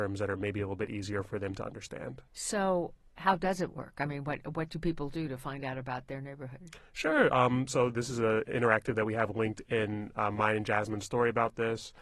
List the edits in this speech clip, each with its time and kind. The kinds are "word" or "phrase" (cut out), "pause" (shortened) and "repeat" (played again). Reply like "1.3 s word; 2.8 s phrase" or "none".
2.3 s pause